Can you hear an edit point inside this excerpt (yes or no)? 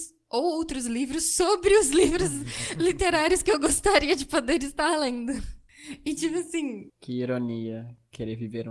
no